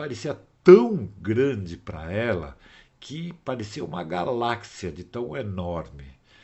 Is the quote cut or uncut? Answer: uncut